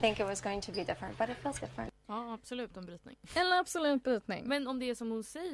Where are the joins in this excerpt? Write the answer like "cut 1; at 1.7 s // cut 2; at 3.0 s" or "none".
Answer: cut 1; at 1.6 s // cut 2; at 2.0 s